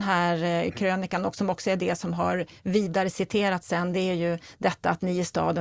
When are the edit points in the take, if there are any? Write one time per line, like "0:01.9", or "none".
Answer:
none